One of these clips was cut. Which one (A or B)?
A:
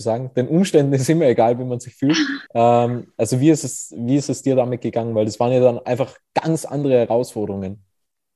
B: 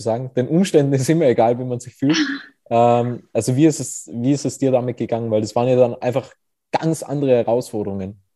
A